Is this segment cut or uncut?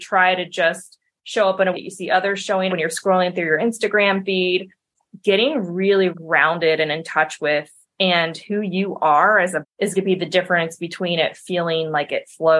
cut